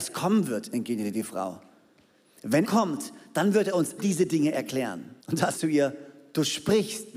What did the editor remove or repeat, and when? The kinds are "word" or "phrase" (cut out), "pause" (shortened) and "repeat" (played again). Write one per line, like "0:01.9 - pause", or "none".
0:02.6 - word
0:04.0 - word
0:05.2 - pause
0:05.5 - phrase